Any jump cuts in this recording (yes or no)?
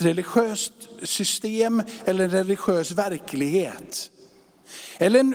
no